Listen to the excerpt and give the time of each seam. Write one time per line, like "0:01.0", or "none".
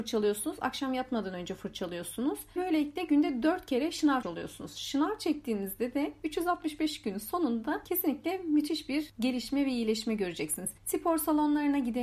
0:02.6
0:04.2
0:10.8